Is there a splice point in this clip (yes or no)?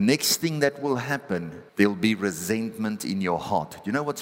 yes